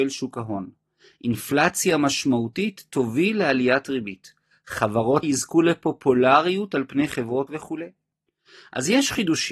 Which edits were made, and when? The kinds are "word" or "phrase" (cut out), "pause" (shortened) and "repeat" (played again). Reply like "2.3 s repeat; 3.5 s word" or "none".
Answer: 5.2 s word; 7.5 s word